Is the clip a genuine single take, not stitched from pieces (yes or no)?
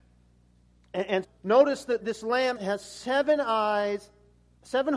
no